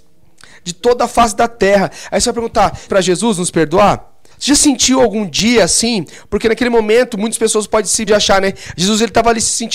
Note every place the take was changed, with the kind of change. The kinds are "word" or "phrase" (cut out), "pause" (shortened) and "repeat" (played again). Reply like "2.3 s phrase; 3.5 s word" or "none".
2.9 s phrase; 4.3 s pause; 8.1 s word

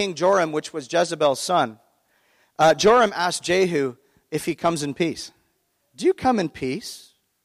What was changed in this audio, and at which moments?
none

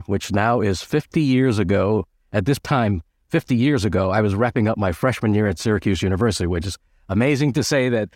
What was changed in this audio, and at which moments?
none

